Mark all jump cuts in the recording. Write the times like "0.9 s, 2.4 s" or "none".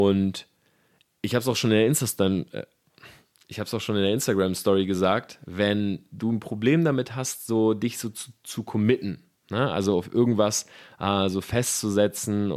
none